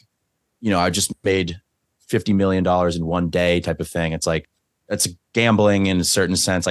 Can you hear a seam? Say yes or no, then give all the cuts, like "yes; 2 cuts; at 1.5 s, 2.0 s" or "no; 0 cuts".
no; 0 cuts